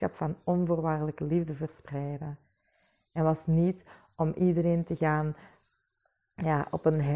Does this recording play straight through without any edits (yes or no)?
yes